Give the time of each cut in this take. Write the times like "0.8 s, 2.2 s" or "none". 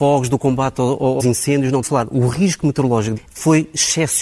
1.2 s, 1.8 s, 3.2 s